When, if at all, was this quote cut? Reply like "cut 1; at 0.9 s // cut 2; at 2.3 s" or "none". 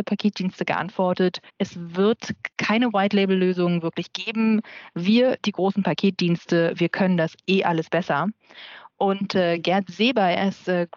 cut 1; at 1.5 s // cut 2; at 2.5 s